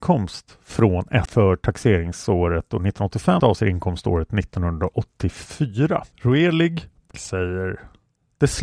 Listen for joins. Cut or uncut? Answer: cut